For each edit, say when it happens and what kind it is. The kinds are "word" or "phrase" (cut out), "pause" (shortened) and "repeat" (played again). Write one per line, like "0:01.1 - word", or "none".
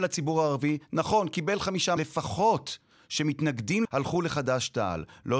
0:02.0 - phrase
0:03.8 - word